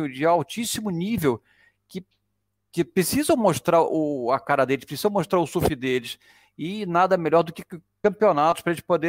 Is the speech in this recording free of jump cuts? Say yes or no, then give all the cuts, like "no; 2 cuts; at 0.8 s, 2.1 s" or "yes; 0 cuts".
yes; 0 cuts